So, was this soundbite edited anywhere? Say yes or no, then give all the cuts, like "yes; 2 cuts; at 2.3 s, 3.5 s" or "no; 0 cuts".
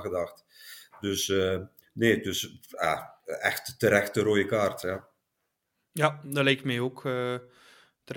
no; 0 cuts